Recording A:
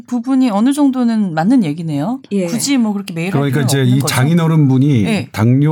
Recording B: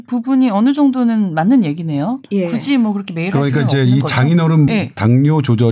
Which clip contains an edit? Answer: B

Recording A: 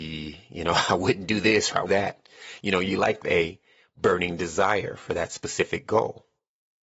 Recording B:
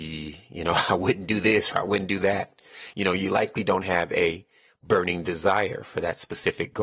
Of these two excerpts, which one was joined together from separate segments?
A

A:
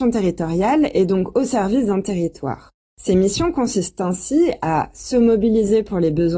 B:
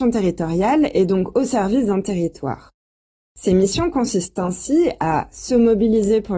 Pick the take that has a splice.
A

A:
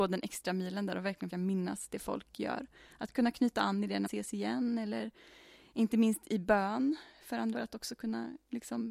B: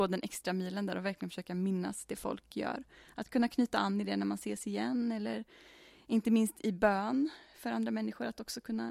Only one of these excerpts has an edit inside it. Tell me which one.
A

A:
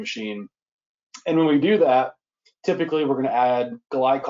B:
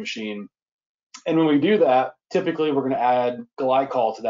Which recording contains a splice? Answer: B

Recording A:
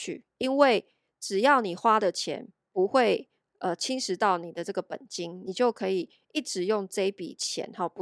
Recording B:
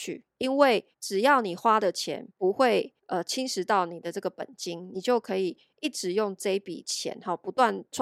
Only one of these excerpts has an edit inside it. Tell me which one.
B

